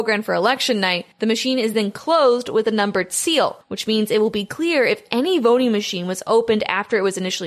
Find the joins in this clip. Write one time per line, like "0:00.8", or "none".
none